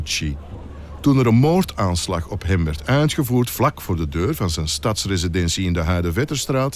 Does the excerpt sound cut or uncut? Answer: uncut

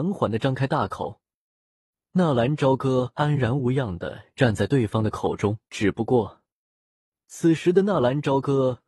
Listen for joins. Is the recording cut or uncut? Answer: cut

